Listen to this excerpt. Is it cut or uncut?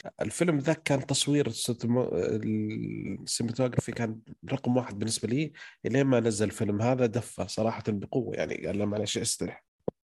uncut